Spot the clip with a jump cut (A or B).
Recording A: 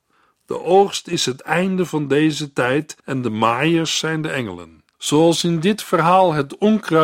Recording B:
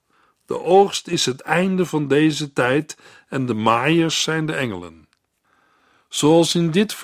A